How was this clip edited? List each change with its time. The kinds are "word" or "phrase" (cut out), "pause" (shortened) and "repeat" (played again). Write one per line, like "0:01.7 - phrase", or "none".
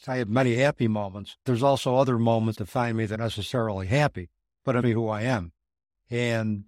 0:01.5 - word
0:02.5 - word
0:03.1 - word
0:04.8 - word

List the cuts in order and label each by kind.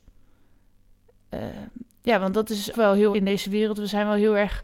0:02.7 - word
0:03.1 - word

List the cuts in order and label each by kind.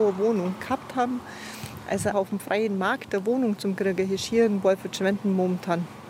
0:02.1 - word

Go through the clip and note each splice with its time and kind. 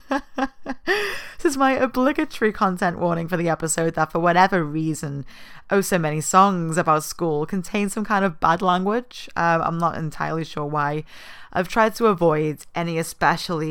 none

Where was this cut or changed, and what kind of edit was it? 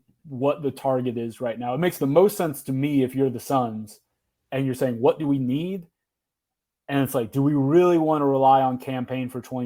none

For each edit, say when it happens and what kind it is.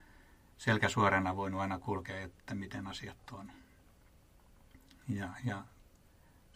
0:02.4 - word

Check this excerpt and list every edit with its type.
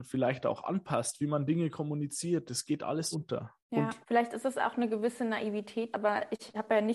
0:03.1 - word
0:03.6 - pause
0:04.0 - pause
0:05.9 - word

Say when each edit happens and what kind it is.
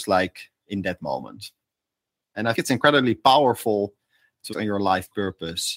0:02.5 - word
0:04.5 - word

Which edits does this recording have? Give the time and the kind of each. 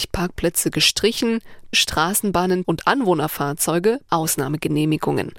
0:01.7 - word
0:02.6 - word
0:04.1 - word

